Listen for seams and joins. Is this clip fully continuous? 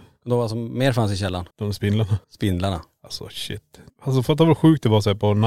no; 3 cuts; at 1.5 s, 2.2 s, 3.9 s

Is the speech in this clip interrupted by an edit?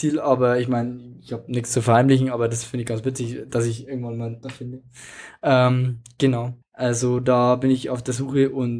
yes; 2 cuts; at 4.4 s, 6.6 s

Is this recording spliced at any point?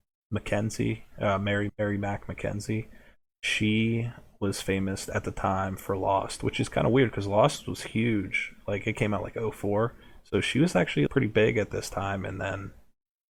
yes; 2 cuts; at 1.7 s, 11.1 s

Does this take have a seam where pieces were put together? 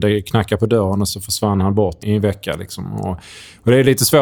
yes; 2 cuts; at 1.1 s, 2.0 s

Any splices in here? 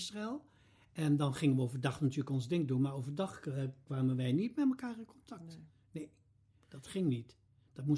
no; 0 cuts

